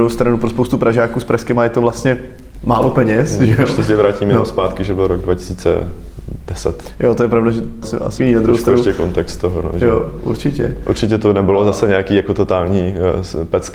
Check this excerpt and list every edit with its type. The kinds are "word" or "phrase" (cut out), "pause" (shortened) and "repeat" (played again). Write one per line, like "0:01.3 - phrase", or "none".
0:01.6 - word
0:07.8 - word
0:08.2 - word